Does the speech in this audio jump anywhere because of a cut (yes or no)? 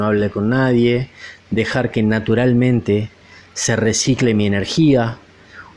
no